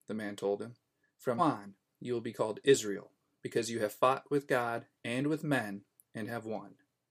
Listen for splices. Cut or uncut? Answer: cut